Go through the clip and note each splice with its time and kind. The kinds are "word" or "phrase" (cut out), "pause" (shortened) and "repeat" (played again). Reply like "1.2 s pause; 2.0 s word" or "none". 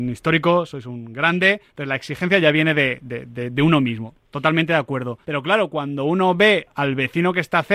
5.2 s pause